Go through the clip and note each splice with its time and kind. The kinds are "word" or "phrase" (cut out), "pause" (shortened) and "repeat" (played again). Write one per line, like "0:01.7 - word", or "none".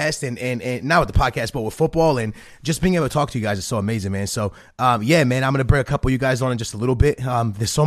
none